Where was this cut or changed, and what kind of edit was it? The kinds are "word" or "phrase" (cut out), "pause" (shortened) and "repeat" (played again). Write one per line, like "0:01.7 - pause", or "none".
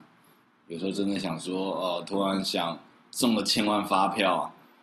none